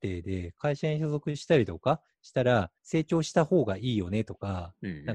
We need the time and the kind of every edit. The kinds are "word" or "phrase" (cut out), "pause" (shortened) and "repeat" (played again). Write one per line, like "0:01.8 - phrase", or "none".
0:02.8 - pause